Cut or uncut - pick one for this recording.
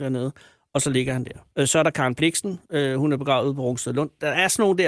cut